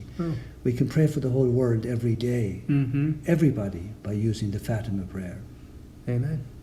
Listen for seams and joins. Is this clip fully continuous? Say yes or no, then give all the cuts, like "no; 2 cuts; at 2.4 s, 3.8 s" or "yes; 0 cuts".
yes; 0 cuts